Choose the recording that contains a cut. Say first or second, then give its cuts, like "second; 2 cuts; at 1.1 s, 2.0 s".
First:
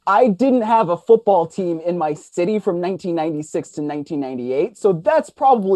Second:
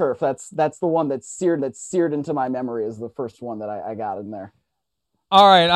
second; 1 cut; at 1.6 s